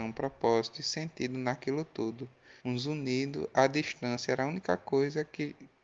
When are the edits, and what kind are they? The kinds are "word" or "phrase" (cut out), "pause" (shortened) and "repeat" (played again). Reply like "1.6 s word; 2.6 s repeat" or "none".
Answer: 2.6 s pause

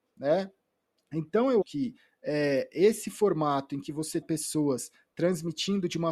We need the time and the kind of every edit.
1.6 s word; 4.2 s word

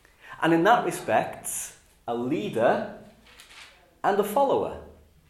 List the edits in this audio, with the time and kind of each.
2.1 s phrase

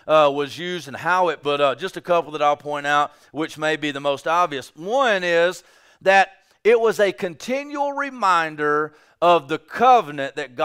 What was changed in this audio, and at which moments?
1.4 s word

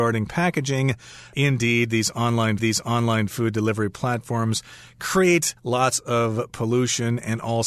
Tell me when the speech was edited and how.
2.6 s repeat; 5.6 s pause

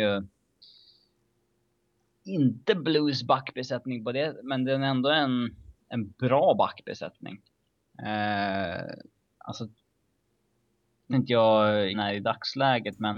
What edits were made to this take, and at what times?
5.8 s pause; 11.1 s word; 11.9 s phrase

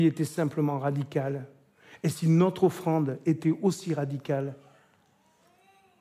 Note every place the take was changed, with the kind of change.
none

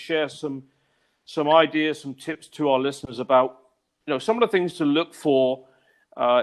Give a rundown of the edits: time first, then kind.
none

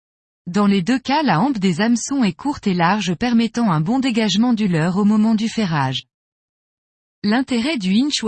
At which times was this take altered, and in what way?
none

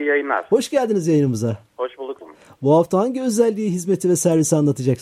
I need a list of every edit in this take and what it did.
2.2 s word

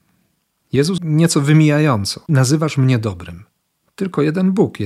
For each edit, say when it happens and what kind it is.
1.0 s word; 2.3 s word

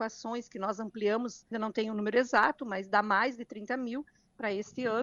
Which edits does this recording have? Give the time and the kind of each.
1.5 s word

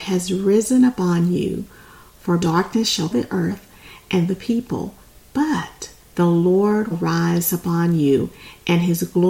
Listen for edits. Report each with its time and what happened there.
2.4 s word; 3.1 s word; 4.3 s phrase; 6.0 s pause; 6.9 s word

